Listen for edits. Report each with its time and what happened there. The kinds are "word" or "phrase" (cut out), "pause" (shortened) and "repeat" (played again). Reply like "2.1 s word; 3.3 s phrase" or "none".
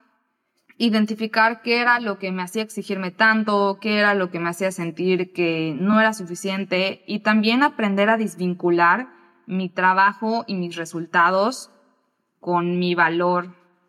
none

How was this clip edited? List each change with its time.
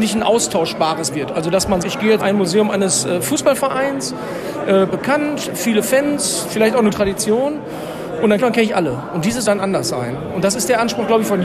1.1 s word; 1.8 s word; 2.2 s word; 4.9 s word; 6.9 s word; 8.4 s phrase; 9.5 s word

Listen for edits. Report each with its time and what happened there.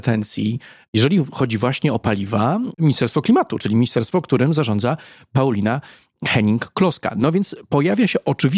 none

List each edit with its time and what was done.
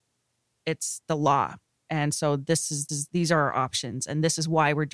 2.9 s repeat

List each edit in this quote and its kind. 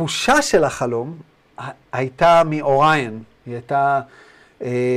none

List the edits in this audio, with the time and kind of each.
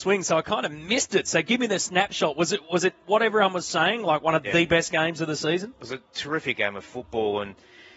none

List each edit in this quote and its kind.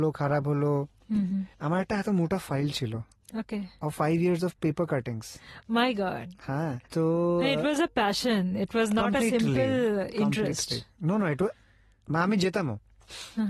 1.5 s pause; 6.9 s pause

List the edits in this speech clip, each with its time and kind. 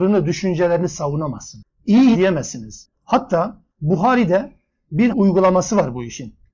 2.1 s word; 3.7 s pause; 5.1 s phrase

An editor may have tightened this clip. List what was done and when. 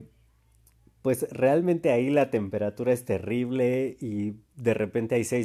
none

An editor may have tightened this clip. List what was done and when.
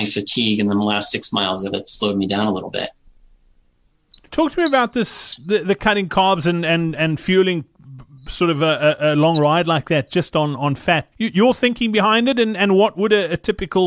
1.7 s phrase; 4.3 s pause; 11.1 s pause

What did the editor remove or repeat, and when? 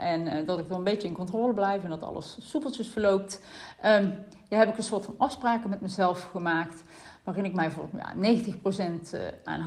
none

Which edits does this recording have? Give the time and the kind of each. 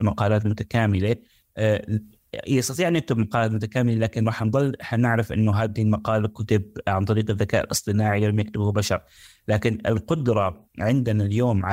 none

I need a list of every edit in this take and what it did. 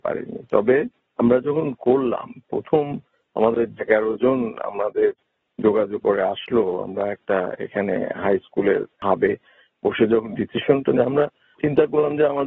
3.8 s word; 6.0 s word; 10.9 s word

